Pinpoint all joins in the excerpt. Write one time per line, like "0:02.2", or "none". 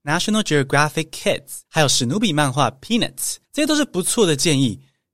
0:01.7
0:03.4

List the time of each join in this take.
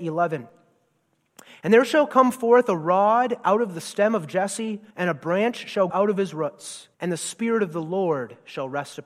0:04.9
0:05.9
0:06.9

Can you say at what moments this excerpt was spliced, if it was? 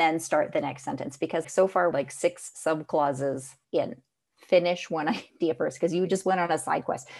0:01.4
0:01.9
0:03.6

